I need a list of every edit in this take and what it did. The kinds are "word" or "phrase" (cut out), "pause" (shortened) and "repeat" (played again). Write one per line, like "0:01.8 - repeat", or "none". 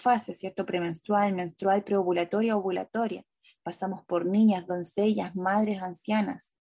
none

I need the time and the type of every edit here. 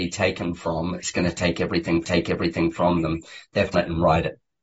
0:02.0 - repeat
0:03.7 - phrase

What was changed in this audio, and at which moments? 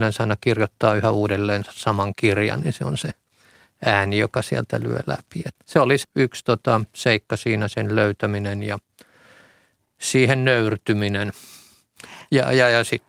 0:05.6 - word
0:06.0 - word

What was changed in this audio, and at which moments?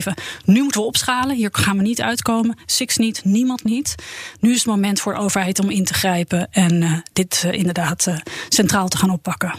none

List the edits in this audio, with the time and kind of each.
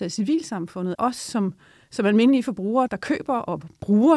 0:00.9 - word
0:02.9 - word

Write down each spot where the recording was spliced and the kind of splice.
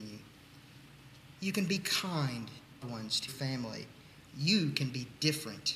0:02.8 - phrase
0:03.3 - word
0:04.3 - pause

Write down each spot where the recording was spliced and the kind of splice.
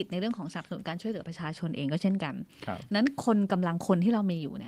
none

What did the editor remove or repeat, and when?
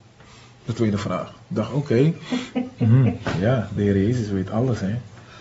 none

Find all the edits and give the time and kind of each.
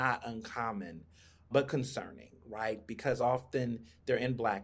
none

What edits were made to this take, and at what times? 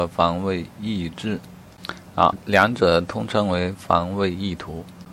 0:02.3 - word

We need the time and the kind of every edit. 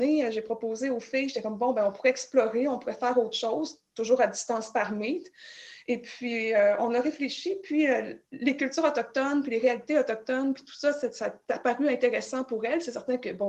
0:08.2 - pause

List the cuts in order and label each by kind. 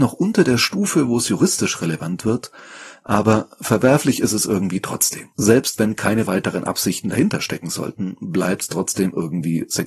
0:05.3 - pause

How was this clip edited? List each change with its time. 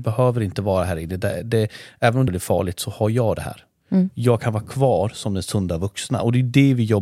0:02.3 - phrase

